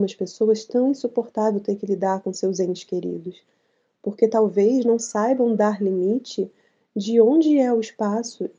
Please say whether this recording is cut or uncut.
uncut